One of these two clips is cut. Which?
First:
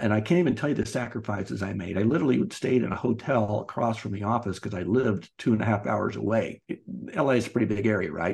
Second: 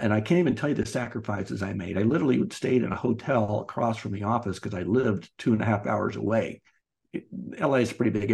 first; 1 cut; at 6.6 s

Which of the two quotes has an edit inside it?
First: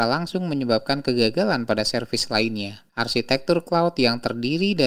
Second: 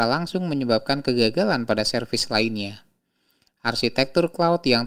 first; 1 cut; at 2.9 s

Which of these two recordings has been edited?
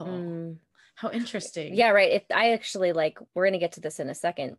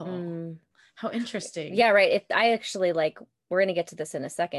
first; 1 cut; at 3.3 s

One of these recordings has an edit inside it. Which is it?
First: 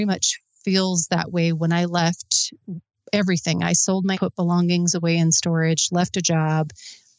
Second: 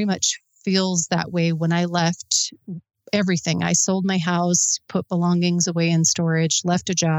first; 1 cut; at 4.1 s

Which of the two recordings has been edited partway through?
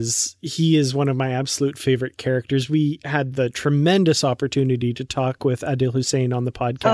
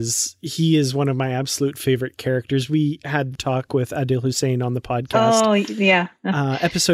second; 1 cut; at 3.3 s

